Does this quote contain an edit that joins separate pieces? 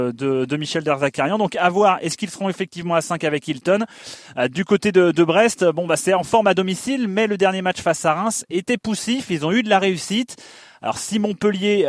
no; 0 cuts

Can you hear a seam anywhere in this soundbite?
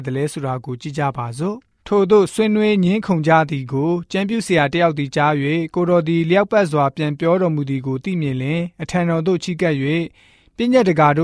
yes; 1 cut; at 1.8 s

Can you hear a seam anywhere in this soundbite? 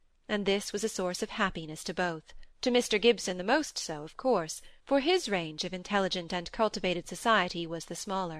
yes; 2 cuts; at 2.5 s, 4.8 s

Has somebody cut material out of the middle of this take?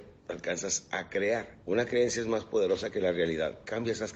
yes; 1 cut; at 1.6 s

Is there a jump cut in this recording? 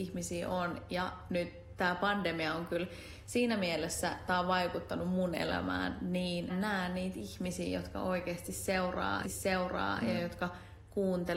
yes; 2 cuts; at 6.5 s, 9.2 s

